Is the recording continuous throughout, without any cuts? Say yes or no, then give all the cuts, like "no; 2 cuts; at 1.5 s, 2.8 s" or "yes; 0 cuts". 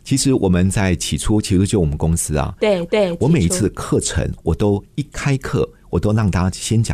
no; 1 cut; at 2.9 s